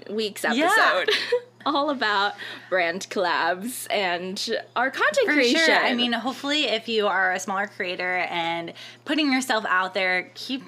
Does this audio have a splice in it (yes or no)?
no